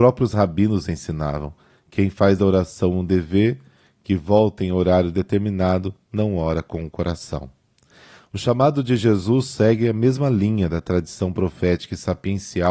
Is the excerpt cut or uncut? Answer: uncut